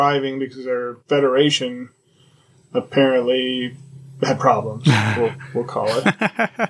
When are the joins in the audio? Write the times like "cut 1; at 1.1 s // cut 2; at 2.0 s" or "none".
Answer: cut 1; at 1.0 s